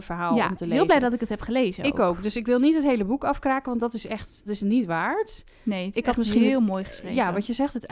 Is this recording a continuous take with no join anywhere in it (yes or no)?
no